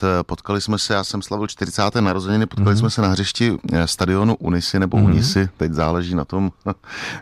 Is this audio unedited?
yes; 0 cuts

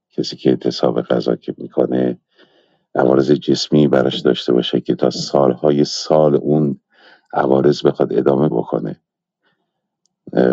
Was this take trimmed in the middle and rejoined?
yes; 1 cut; at 8.5 s

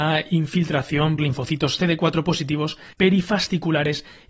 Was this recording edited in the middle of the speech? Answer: yes; 2 cuts; at 1.2 s, 2.9 s

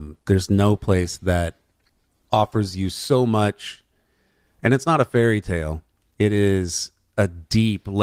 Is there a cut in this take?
no; 0 cuts

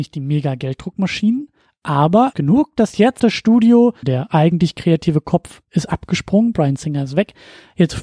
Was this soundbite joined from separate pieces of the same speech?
yes; 3 cuts; at 2.3 s, 3.2 s, 4.0 s

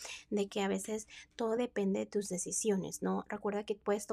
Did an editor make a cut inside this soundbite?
no; 0 cuts

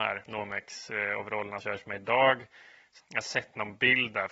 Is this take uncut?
no; 2 cuts; at 1.6 s, 3.0 s

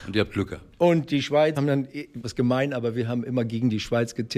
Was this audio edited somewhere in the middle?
yes; 2 cuts; at 1.6 s, 2.2 s

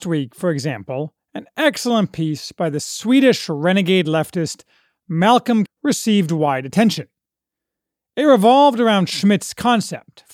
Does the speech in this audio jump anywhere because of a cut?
yes; 1 cut; at 5.7 s

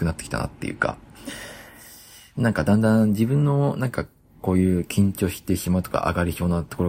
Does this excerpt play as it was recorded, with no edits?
yes; 0 cuts

